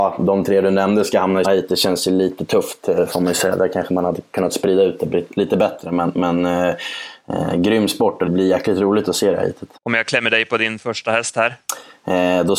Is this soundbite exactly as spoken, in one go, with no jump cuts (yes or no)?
no